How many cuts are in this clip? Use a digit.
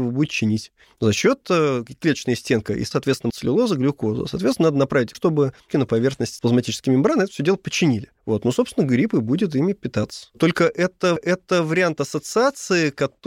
6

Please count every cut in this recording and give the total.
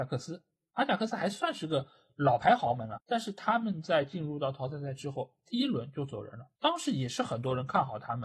2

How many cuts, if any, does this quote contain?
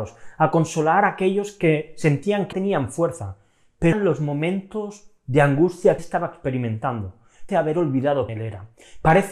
5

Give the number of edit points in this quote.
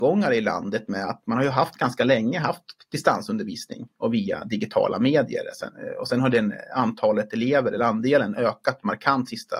0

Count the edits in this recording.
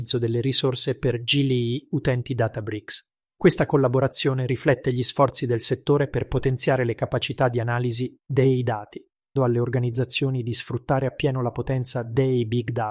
2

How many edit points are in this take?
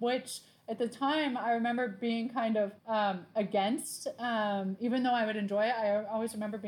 1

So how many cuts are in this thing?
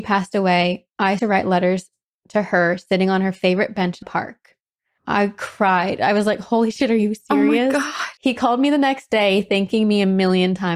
3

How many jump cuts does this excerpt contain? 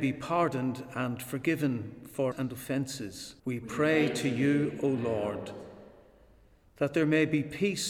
2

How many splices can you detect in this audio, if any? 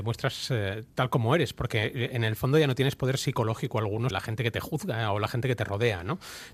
1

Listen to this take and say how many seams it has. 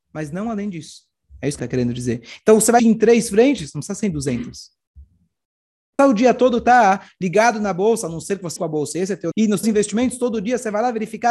6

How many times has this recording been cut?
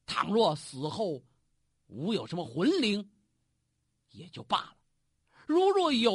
0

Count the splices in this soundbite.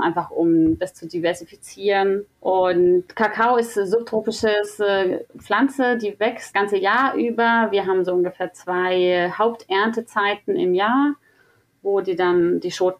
3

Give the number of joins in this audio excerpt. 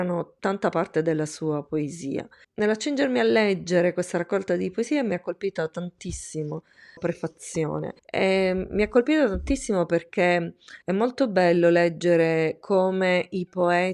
3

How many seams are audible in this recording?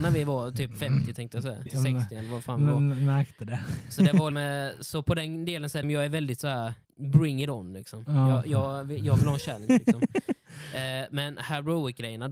4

